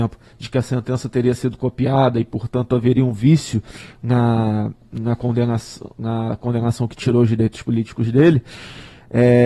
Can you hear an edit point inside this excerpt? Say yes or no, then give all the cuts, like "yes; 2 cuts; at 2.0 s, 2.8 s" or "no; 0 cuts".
no; 0 cuts